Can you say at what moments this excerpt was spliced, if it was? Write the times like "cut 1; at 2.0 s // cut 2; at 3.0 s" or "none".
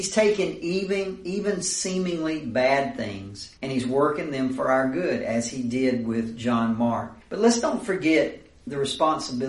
cut 1; at 3.6 s // cut 2; at 7.2 s